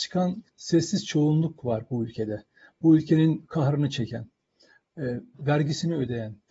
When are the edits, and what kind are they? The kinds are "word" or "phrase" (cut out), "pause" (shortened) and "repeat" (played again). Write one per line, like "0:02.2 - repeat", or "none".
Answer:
none